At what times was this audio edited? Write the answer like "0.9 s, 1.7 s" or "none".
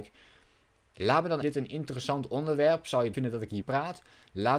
1.4 s, 3.1 s, 3.6 s